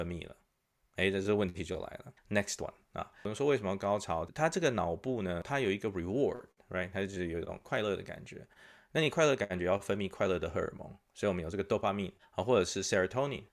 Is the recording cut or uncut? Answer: cut